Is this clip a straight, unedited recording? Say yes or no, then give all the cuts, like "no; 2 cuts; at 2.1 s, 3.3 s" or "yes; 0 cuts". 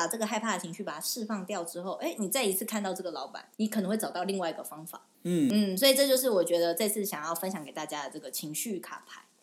no; 2 cuts; at 3.5 s, 5.1 s